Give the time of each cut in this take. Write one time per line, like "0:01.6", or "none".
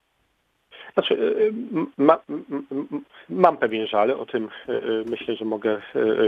none